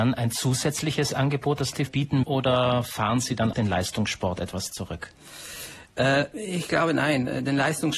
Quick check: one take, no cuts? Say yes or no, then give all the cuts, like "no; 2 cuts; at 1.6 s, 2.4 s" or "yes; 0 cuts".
no; 3 cuts; at 1.9 s, 2.2 s, 3.5 s